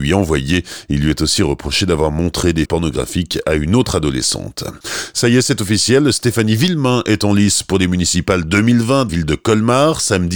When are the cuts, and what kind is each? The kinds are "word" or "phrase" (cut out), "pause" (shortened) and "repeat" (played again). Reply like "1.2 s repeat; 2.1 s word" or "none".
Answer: 2.7 s word; 9.1 s word